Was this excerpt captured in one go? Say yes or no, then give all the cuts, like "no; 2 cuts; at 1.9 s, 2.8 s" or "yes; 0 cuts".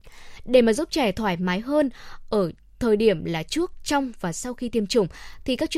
yes; 0 cuts